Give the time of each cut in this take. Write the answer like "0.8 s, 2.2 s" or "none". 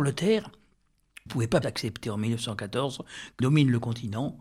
1.3 s, 1.6 s, 3.4 s